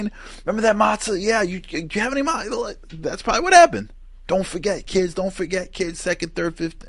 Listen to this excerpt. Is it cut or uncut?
uncut